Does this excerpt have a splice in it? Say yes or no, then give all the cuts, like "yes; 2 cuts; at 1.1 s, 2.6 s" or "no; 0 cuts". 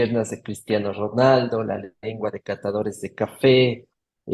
no; 0 cuts